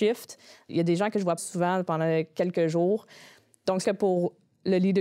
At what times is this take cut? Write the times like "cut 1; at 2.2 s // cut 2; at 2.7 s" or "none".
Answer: cut 1; at 1.4 s // cut 2; at 3.8 s